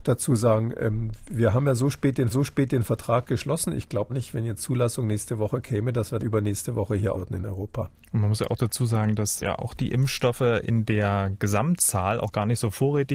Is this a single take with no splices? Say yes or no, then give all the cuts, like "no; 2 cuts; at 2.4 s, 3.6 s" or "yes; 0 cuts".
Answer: no; 7 cuts; at 2.3 s, 4.1 s, 4.6 s, 6.2 s, 7.1 s, 7.9 s, 9.4 s